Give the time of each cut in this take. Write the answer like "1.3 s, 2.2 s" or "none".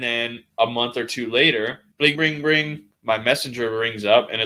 2.1 s